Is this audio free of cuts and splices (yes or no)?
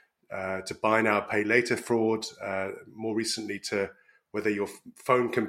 yes